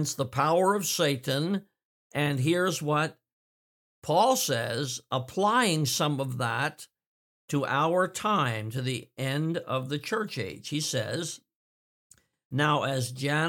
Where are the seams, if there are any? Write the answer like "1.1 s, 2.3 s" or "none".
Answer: none